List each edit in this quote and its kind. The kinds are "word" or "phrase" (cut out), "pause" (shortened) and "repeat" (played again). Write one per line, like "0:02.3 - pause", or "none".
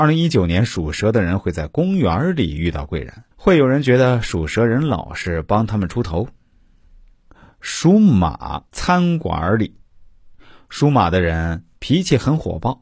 0:03.3 - pause
0:08.7 - pause